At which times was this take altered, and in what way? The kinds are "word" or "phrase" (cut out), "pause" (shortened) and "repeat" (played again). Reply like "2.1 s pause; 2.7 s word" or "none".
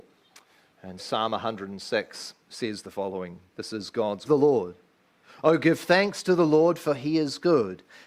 1.0 s word; 2.4 s pause; 3.5 s pause; 4.3 s phrase

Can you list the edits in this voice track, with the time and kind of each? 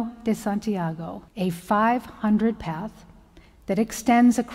1.3 s pause; 2.5 s word

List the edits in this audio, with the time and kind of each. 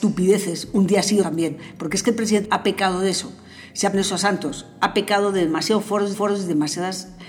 1.2 s word; 2.4 s word; 3.9 s word; 6.1 s repeat

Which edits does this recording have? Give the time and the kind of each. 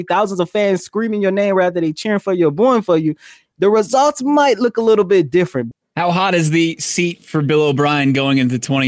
none

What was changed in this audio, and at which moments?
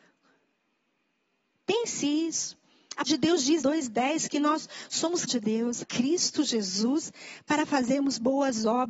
2.0 s word; 3.1 s word; 3.6 s phrase; 5.3 s word; 5.8 s phrase

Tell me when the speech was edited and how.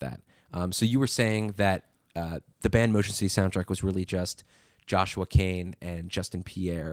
none

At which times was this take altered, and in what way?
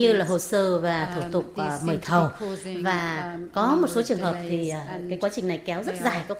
none

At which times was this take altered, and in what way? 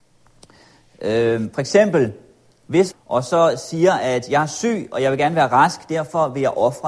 2.9 s phrase

